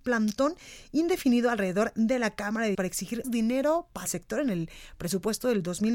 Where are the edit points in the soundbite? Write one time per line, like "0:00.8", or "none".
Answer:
0:02.7
0:03.2
0:04.1